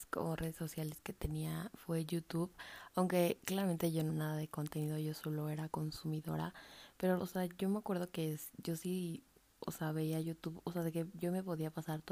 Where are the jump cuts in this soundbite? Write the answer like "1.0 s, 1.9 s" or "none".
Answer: 4.1 s, 5.7 s, 7.2 s